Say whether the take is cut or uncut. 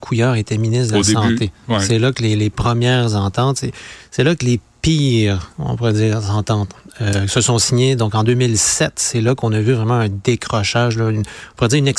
uncut